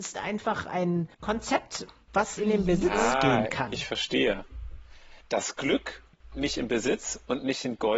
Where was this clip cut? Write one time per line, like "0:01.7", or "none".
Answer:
0:01.1
0:02.4
0:05.2
0:06.3